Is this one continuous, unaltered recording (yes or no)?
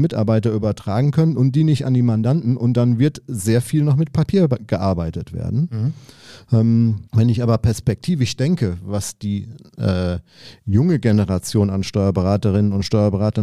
no